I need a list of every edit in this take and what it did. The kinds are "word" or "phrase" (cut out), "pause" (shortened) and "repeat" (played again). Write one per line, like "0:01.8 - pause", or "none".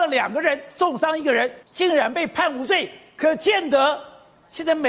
0:01.6 - pause